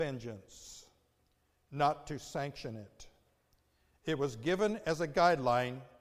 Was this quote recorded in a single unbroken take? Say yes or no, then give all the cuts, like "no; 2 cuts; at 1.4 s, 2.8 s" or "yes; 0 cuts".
yes; 0 cuts